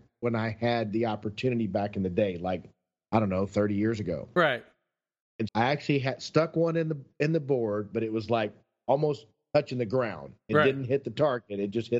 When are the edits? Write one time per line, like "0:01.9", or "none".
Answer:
0:05.5